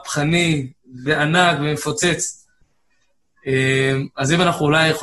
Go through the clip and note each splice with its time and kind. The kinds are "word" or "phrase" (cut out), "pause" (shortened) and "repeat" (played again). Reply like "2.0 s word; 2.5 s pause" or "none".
1.1 s word